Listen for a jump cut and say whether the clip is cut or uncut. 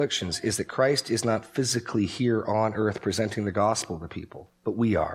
uncut